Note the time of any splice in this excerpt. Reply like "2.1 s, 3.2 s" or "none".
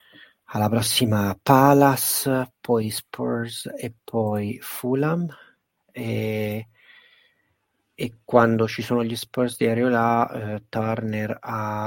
none